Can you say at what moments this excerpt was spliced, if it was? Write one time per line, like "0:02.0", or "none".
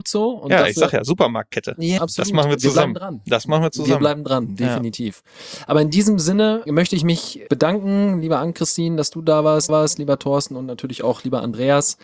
0:02.0
0:06.7
0:07.5
0:09.7